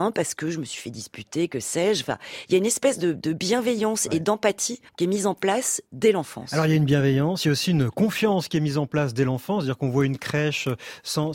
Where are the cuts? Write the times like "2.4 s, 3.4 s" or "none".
4.9 s, 5.9 s

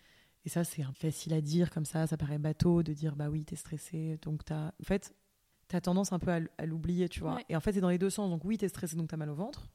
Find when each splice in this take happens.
0.9 s, 4.8 s, 5.5 s

